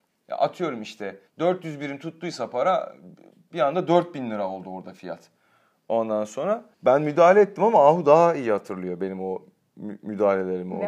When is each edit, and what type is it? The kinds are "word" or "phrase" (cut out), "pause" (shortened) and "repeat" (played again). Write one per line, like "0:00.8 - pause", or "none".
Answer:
0:01.3 - pause
0:06.7 - pause